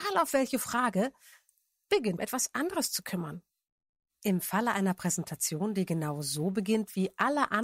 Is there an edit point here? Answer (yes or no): yes